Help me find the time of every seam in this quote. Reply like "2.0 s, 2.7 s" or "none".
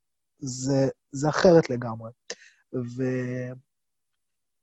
none